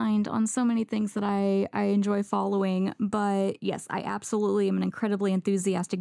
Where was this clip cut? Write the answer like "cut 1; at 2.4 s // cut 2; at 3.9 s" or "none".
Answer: none